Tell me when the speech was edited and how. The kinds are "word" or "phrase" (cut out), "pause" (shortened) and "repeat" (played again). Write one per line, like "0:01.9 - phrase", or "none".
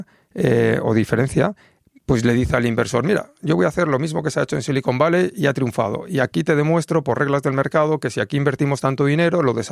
none